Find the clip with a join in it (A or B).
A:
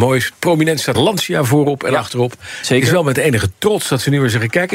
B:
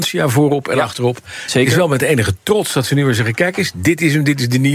A